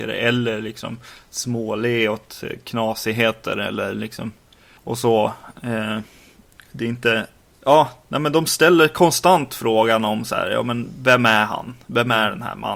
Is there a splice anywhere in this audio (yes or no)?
no